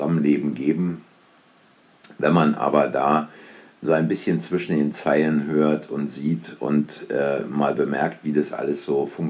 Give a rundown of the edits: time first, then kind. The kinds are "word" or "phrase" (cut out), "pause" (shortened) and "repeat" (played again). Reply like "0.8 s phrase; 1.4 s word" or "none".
none